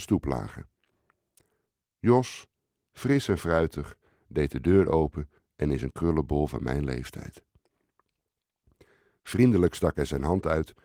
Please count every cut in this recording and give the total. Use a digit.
0